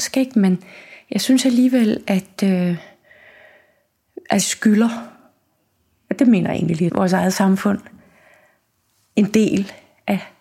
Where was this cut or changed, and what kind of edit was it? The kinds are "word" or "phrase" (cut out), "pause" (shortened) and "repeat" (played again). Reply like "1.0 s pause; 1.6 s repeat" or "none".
4.4 s word; 6.9 s word